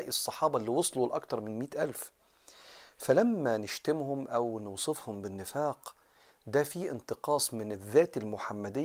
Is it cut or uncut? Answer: uncut